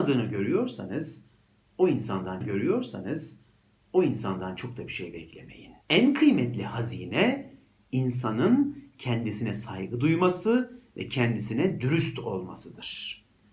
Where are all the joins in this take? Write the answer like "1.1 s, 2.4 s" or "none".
2.4 s, 5.8 s